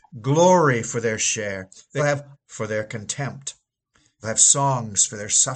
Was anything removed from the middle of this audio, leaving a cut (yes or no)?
yes